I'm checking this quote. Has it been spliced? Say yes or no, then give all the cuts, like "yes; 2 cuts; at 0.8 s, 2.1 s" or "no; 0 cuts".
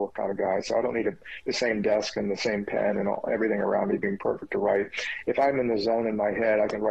no; 0 cuts